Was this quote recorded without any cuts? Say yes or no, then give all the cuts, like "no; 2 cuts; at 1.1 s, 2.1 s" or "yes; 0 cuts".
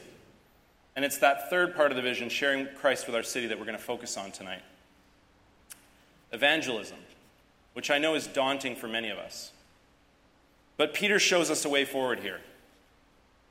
yes; 0 cuts